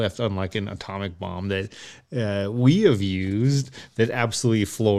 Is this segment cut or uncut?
uncut